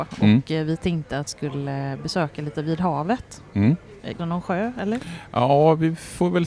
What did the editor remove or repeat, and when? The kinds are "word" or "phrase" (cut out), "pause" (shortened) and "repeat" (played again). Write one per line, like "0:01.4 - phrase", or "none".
0:01.3 - word
0:02.5 - word
0:04.2 - word